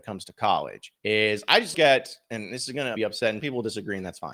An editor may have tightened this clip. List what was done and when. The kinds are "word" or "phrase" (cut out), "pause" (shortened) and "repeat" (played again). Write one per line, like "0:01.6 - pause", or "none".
0:01.0 - pause
0:01.7 - word
0:03.0 - word
0:03.4 - word